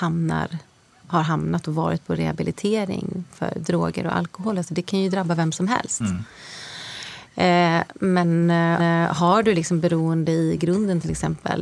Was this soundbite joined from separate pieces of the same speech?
yes; 1 cut; at 8.8 s

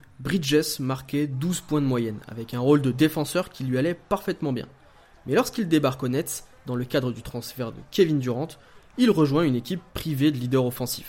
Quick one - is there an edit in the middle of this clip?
no; 0 cuts

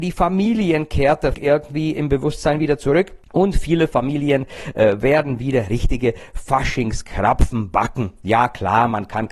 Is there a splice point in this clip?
yes; 1 cut; at 1.3 s

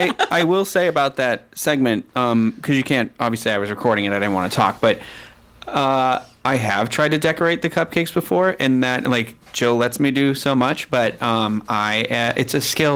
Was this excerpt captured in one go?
yes; 0 cuts

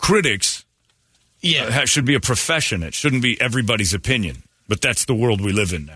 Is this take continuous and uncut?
yes; 0 cuts

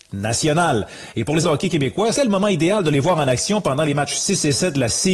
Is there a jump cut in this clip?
yes; 2 cuts; at 1.4 s, 2.1 s

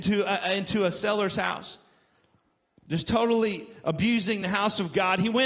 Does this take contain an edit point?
no; 0 cuts

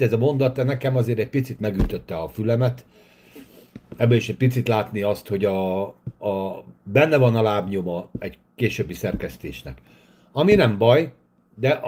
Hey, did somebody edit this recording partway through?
no; 0 cuts

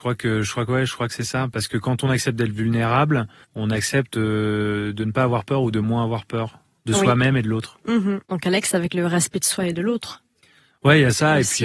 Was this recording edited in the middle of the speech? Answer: yes; 3 cuts; at 3.4 s, 6.8 s, 8.2 s

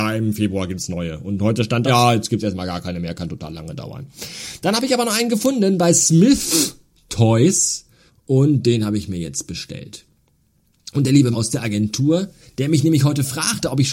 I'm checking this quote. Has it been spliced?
yes; 3 cuts; at 1.9 s, 8.1 s, 11.3 s

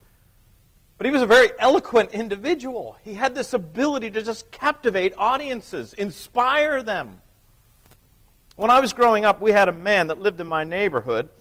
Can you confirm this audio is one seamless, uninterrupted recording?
yes; 0 cuts

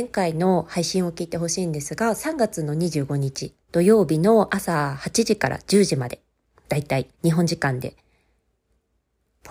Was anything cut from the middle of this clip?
yes; 2 cuts; at 3.6 s, 7.1 s

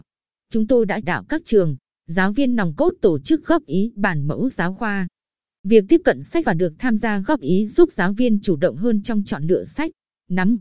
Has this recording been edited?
yes; 3 cuts; at 1.0 s, 4.5 s, 6.4 s

